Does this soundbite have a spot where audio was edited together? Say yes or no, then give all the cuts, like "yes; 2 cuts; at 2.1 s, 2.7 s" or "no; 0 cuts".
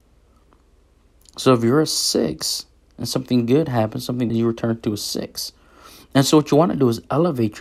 yes; 1 cut; at 4.3 s